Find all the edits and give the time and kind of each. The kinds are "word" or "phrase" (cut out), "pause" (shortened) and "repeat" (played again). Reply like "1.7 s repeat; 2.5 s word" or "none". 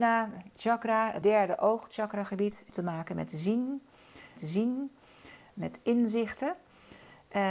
1.2 s phrase; 2.7 s word; 4.4 s repeat